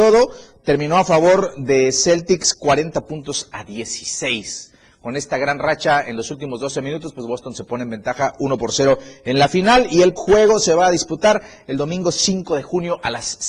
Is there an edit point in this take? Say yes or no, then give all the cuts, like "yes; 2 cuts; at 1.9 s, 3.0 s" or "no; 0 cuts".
yes; 2 cuts; at 7.3 s, 10.2 s